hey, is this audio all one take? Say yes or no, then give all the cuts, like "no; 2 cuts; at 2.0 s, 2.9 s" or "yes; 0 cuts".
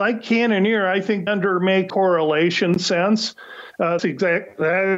no; 3 cuts; at 1.3 s, 1.9 s, 4.0 s